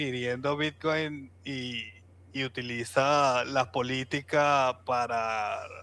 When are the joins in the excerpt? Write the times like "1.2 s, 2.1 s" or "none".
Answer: none